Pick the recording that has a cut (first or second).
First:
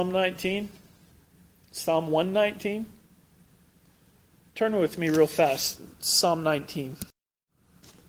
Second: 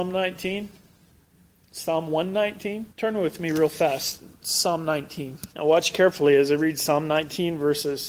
second